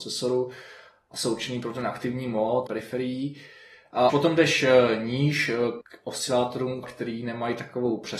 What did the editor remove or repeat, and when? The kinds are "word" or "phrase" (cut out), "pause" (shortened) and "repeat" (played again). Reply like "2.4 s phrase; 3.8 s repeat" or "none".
2.7 s phrase; 4.1 s word; 5.8 s word; 6.8 s word